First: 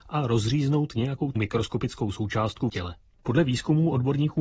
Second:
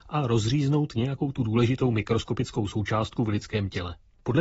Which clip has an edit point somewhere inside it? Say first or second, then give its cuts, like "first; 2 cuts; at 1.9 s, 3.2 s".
first; 2 cuts; at 1.4 s, 2.7 s